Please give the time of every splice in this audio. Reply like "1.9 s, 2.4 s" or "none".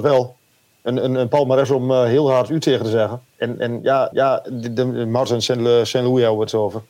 3.3 s, 4.1 s